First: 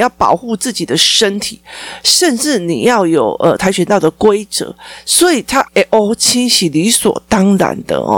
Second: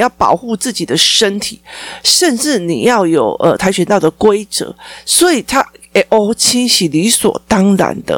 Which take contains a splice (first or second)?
first